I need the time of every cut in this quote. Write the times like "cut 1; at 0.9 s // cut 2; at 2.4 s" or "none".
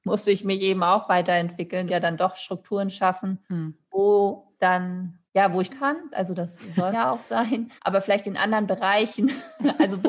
cut 1; at 1.9 s // cut 2; at 3.4 s // cut 3; at 5.3 s // cut 4; at 5.7 s // cut 5; at 6.9 s // cut 6; at 7.8 s